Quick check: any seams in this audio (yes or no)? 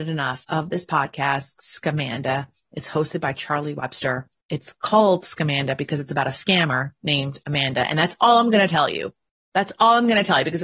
yes